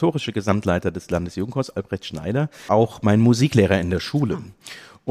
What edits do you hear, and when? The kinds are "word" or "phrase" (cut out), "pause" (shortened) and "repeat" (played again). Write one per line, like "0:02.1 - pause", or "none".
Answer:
0:02.7 - word

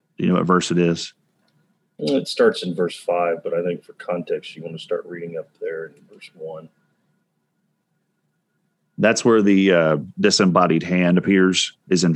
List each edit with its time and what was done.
none

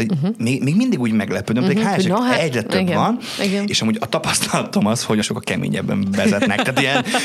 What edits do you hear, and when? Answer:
0:02.4 - word
0:05.2 - phrase

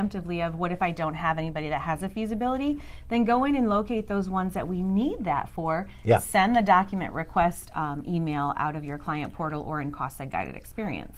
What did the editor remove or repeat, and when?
none

